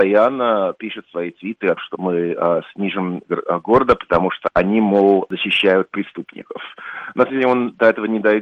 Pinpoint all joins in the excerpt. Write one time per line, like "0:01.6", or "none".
0:01.8
0:03.3
0:07.3